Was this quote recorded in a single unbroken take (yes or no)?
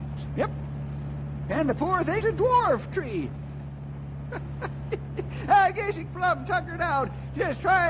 no